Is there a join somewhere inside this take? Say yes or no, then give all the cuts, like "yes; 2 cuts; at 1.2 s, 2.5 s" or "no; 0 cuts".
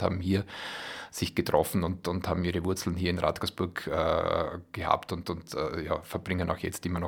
no; 0 cuts